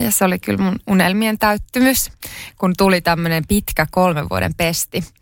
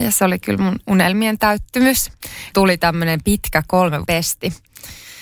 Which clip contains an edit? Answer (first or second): second